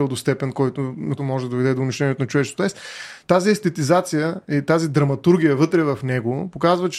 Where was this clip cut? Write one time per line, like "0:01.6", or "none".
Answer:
0:01.2